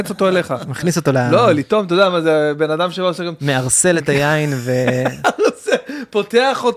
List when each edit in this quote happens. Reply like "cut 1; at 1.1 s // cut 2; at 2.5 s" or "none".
none